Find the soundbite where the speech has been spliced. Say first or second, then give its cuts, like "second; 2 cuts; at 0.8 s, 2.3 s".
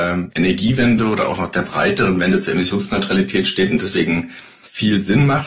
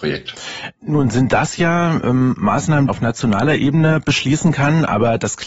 second; 1 cut; at 2.9 s